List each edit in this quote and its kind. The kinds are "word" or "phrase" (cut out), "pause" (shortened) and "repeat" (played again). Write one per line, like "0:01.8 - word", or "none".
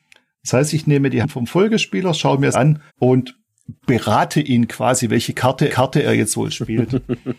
0:01.2 - word
0:02.5 - word
0:02.9 - pause
0:05.7 - repeat